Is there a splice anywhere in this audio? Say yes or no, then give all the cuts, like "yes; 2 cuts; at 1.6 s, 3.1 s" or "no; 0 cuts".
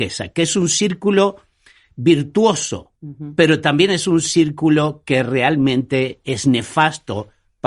yes; 1 cut; at 3.0 s